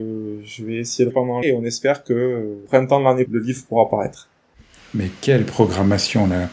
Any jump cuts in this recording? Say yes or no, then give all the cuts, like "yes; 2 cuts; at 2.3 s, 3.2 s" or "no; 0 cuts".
yes; 5 cuts; at 1.1 s, 1.4 s, 2.7 s, 3.3 s, 4.5 s